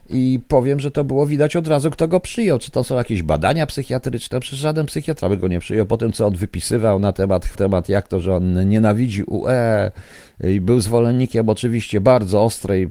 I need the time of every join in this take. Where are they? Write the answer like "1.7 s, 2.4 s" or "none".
7.5 s